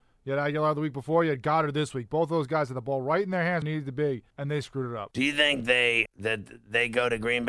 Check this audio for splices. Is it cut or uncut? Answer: cut